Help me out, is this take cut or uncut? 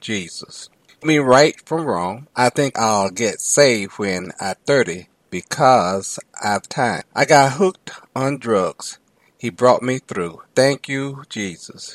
cut